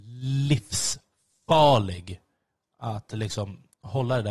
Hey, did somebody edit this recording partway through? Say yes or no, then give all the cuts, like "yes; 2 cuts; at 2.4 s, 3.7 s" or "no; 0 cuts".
yes; 1 cut; at 2.5 s